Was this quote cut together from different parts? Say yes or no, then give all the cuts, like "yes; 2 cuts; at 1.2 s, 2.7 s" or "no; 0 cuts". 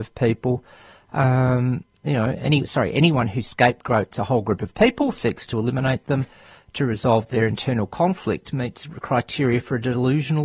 no; 0 cuts